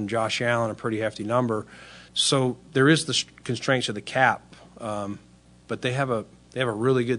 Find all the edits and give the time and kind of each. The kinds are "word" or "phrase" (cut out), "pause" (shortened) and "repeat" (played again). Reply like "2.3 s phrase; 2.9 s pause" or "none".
2.1 s pause